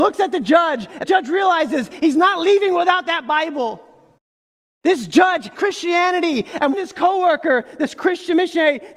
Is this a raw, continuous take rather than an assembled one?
no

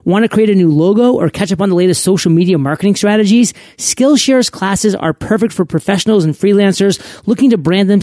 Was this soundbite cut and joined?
no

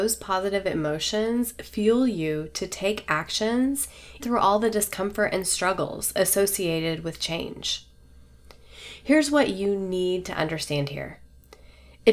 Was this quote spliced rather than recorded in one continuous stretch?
yes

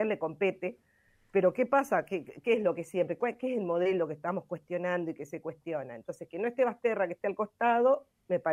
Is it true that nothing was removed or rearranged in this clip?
yes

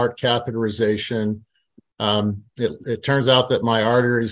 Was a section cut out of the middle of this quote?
no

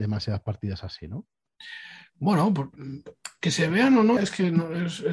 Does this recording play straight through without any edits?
no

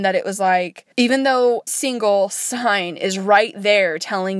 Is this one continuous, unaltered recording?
no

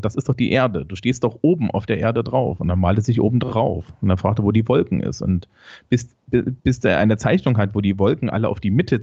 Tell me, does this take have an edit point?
yes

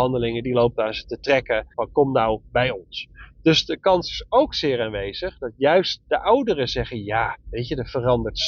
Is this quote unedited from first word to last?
no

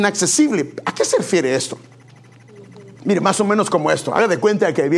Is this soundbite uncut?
no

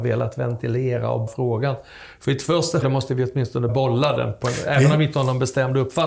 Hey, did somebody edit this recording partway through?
yes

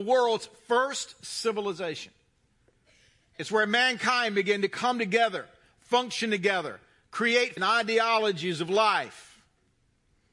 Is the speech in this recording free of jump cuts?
no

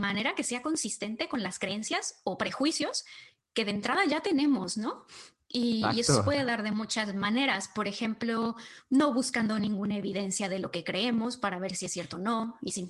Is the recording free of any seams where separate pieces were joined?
yes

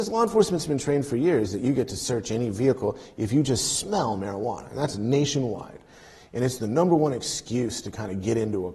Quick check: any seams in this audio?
no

